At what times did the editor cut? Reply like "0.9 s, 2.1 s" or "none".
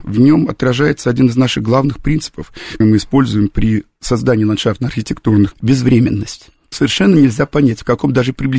2.8 s, 5.5 s, 6.7 s